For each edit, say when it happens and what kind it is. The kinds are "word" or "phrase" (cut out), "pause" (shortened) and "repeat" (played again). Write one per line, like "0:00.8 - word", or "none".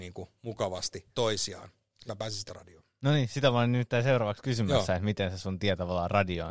0:01.1 - word
0:02.1 - word
0:02.5 - word